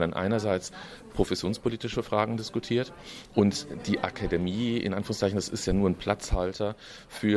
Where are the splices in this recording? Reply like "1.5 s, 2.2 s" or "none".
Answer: none